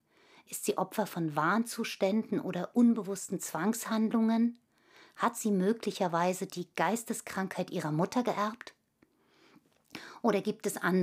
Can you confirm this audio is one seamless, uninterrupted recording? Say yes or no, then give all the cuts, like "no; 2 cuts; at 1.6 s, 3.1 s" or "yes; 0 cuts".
yes; 0 cuts